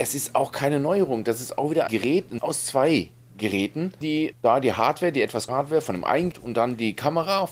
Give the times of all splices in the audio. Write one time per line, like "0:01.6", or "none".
0:01.9
0:02.4
0:04.0
0:04.3
0:05.5
0:06.3